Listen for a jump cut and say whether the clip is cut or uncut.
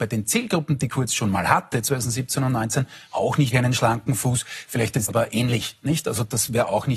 cut